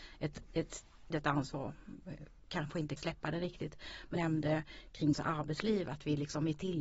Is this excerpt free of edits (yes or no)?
no